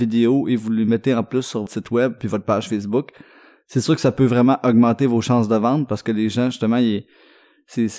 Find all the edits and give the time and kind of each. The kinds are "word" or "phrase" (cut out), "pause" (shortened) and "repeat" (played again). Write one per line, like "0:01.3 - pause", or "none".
0:01.7 - phrase